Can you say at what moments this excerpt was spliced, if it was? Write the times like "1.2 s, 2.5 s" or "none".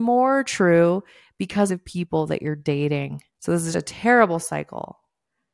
1.7 s, 3.3 s, 3.7 s